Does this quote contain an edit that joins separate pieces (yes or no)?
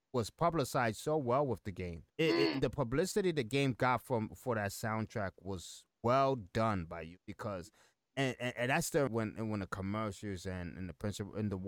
yes